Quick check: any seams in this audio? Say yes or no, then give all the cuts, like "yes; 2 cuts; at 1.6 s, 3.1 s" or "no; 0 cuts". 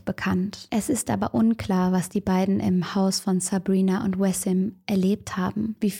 no; 0 cuts